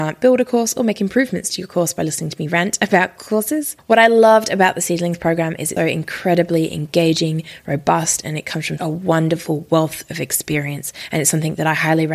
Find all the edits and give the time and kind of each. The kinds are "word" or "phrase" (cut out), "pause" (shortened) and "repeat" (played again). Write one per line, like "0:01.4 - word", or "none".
0:05.8 - word
0:08.8 - word